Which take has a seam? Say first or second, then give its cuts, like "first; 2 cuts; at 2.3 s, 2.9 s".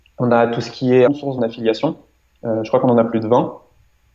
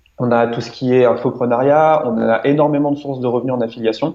first; 2 cuts; at 1.1 s, 1.4 s